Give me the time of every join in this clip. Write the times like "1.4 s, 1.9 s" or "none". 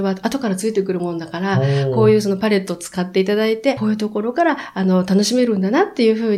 3.8 s